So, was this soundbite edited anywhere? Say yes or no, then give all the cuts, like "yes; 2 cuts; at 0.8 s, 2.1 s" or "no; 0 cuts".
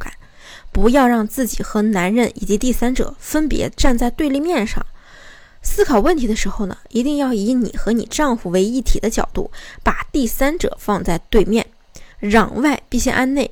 yes; 1 cut; at 12.1 s